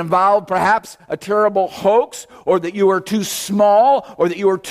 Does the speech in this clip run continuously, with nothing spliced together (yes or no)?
yes